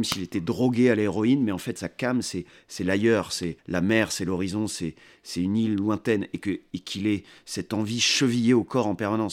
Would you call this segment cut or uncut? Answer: cut